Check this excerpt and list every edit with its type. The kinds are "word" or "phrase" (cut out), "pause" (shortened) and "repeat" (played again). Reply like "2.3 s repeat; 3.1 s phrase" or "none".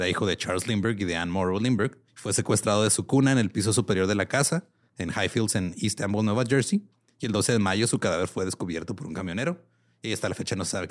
2.1 s pause